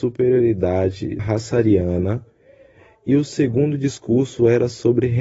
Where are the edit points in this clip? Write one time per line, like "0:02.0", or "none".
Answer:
0:01.2